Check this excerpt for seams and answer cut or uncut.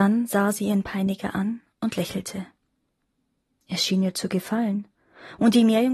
uncut